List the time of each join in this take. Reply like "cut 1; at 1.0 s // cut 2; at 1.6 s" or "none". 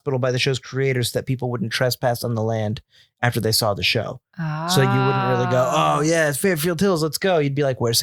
none